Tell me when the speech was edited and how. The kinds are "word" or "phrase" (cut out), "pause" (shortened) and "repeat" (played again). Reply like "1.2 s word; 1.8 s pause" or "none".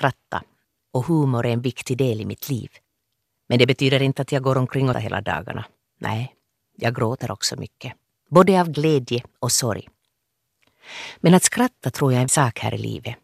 4.9 s word; 12.3 s word